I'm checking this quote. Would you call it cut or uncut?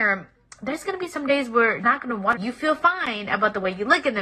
cut